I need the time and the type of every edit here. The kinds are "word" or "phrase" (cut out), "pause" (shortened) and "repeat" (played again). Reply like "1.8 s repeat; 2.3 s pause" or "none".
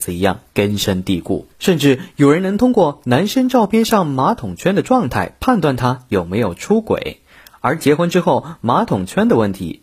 1.5 s pause

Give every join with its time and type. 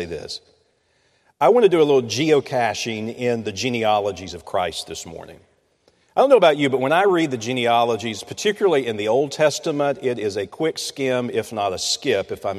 none

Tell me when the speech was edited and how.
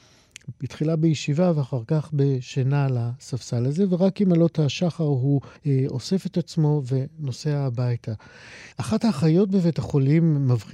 5.6 s pause; 8.7 s pause

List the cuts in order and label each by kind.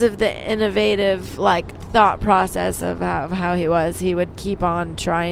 4.3 s word

